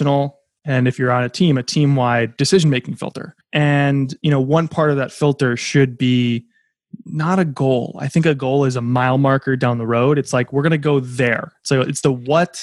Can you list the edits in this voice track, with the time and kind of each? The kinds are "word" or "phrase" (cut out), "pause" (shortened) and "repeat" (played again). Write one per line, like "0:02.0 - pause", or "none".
0:03.4 - pause